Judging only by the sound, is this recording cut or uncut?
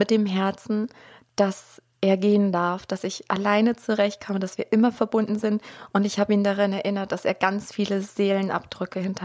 uncut